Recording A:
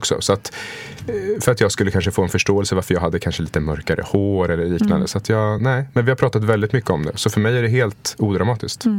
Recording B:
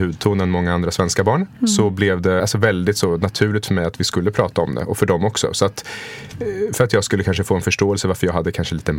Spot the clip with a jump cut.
B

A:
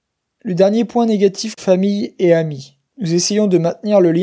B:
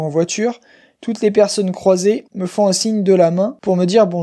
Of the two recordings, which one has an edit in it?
A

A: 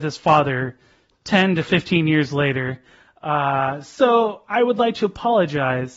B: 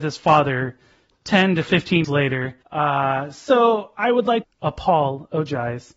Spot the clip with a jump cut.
B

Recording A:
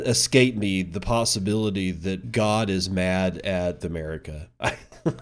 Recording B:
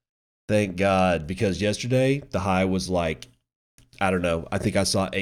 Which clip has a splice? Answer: A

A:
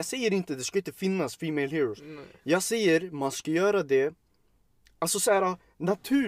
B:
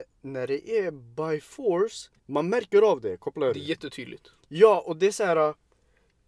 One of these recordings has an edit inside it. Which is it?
B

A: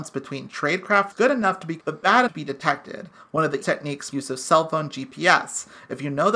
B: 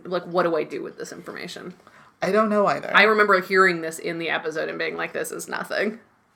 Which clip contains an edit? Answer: A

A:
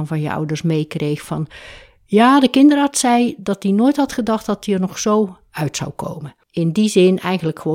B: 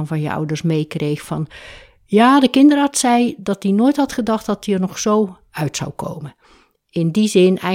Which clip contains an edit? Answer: A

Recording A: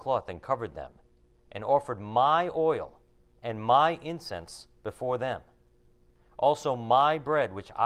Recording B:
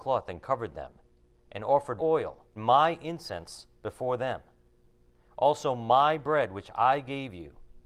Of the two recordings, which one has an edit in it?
B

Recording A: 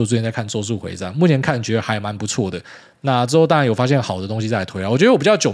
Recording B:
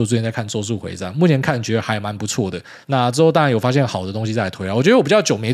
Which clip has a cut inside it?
B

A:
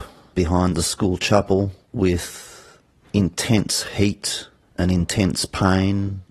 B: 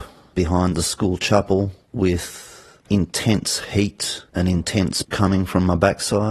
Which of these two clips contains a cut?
B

